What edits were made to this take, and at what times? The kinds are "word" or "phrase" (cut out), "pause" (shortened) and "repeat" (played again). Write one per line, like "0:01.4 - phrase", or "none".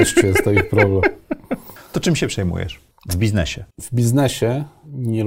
0:03.7 - pause